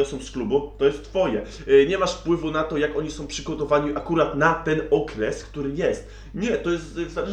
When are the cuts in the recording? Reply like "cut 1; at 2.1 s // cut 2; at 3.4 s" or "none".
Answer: none